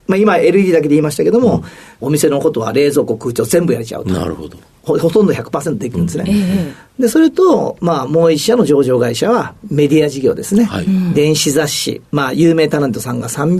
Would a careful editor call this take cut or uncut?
uncut